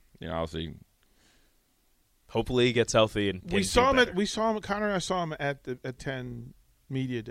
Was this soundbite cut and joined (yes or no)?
yes